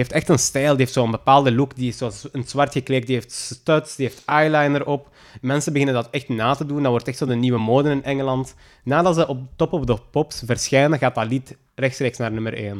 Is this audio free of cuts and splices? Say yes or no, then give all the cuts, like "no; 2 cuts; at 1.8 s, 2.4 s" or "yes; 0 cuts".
yes; 0 cuts